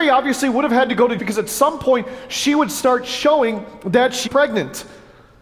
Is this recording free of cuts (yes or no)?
no